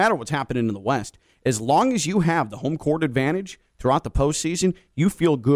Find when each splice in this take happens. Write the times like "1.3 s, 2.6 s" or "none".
none